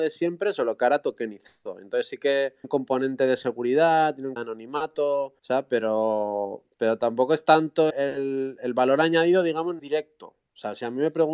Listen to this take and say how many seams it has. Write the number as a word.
six